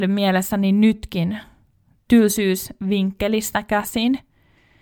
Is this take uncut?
yes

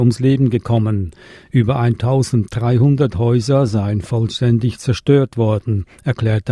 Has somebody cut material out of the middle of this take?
no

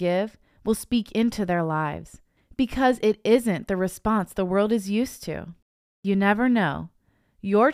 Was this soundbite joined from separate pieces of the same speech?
no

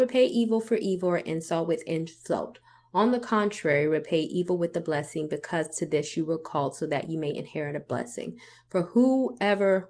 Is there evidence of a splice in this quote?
no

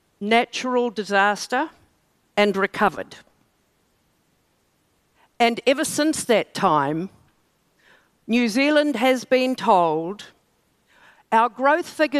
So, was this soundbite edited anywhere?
no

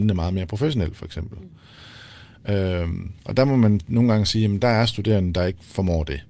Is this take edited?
yes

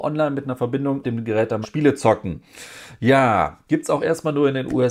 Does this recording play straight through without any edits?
no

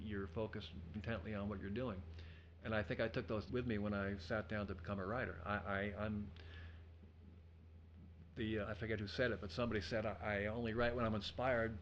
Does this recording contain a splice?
yes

